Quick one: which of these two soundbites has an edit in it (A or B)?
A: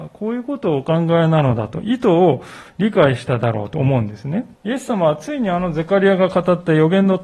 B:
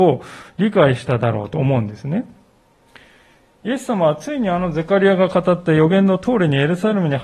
A